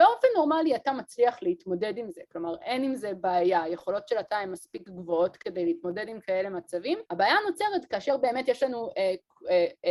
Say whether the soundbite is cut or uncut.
cut